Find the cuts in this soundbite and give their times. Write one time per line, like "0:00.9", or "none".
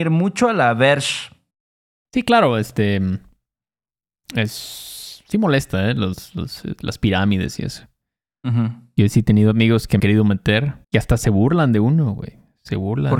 0:10.0
0:10.8